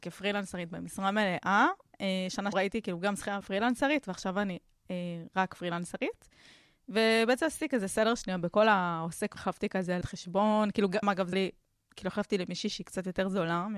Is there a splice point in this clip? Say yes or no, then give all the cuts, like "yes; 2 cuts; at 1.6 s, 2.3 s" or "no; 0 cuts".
yes; 6 cuts; at 2.5 s, 3.4 s, 9.4 s, 10.0 s, 11.0 s, 11.3 s